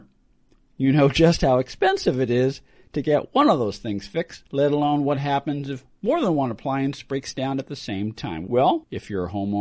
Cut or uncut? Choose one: uncut